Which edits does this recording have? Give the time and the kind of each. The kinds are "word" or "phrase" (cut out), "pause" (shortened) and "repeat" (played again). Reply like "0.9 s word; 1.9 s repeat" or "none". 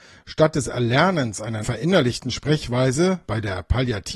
1.6 s word; 3.3 s word